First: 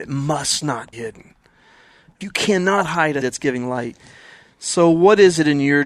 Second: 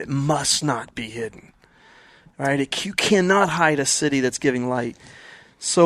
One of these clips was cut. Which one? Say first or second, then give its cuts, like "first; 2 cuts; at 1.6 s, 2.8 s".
first; 3 cuts; at 0.9 s, 2.2 s, 3.2 s